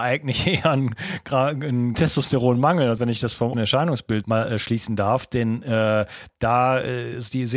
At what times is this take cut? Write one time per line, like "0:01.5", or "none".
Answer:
0:01.9
0:03.0
0:03.5
0:04.2